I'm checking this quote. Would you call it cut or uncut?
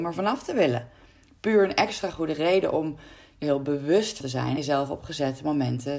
cut